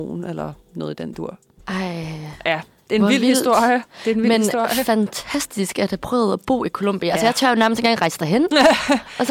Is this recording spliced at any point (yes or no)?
no